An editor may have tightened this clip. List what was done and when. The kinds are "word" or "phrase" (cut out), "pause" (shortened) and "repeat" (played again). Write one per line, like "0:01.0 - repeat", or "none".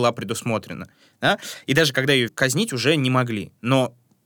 0:02.3 - word